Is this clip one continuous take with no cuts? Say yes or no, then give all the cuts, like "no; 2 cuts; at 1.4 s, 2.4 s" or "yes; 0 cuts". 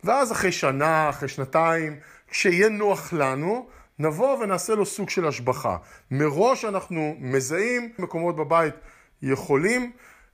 no; 1 cut; at 8.0 s